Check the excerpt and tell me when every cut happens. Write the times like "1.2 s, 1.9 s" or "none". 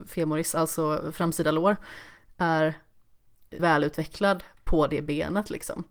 3.6 s